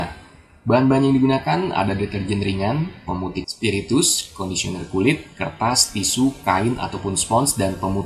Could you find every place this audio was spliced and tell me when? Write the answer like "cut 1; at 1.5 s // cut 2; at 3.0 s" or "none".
cut 1; at 3.4 s